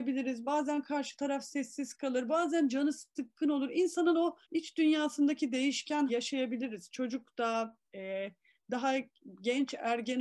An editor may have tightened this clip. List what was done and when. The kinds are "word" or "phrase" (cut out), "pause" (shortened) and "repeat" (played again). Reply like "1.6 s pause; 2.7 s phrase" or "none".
4.4 s pause; 6.1 s word; 7.8 s pause